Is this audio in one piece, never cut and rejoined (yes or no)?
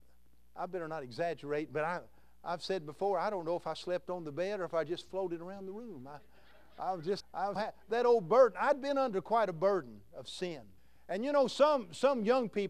no